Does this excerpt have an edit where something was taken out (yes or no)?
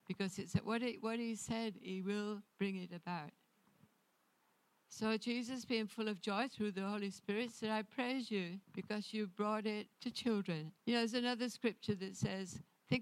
yes